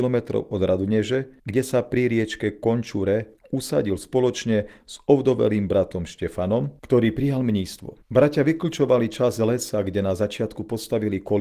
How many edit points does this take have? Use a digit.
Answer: 4